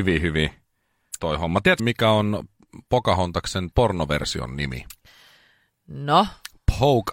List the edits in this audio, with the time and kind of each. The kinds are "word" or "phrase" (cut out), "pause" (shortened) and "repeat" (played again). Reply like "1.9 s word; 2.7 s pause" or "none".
1.2 s word; 1.8 s word; 3.7 s word